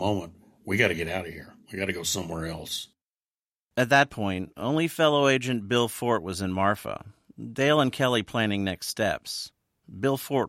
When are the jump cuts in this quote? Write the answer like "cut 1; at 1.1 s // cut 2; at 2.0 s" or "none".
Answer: cut 1; at 1.6 s